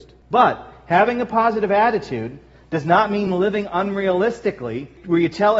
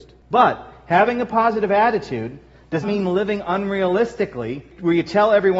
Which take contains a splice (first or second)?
second